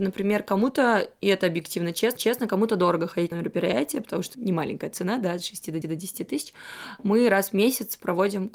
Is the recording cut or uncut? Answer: cut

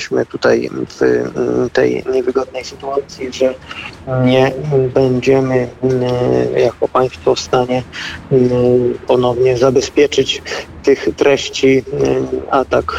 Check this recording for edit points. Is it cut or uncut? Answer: uncut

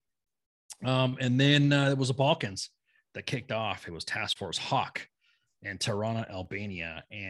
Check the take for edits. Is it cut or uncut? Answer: uncut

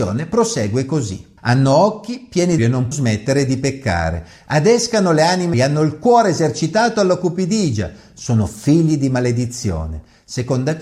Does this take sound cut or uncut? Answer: cut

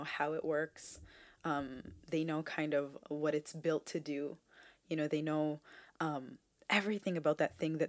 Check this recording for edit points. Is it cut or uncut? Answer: uncut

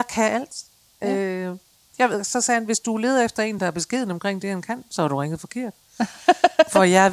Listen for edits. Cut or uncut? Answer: uncut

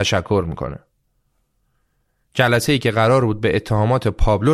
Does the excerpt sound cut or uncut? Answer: uncut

